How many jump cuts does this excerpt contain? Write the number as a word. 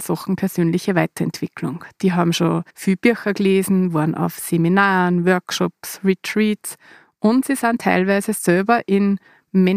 one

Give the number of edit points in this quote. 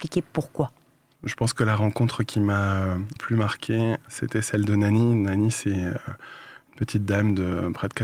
one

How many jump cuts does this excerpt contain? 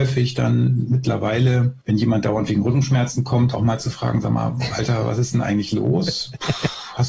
one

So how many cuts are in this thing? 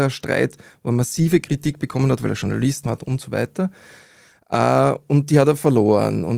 one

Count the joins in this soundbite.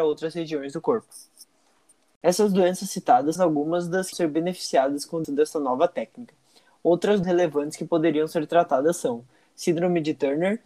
four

